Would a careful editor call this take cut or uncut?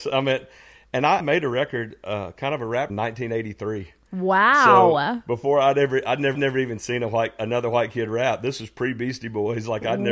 cut